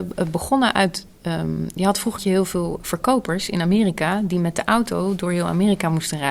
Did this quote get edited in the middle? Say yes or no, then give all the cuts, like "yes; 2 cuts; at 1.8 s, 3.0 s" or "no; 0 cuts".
yes; 1 cut; at 2.2 s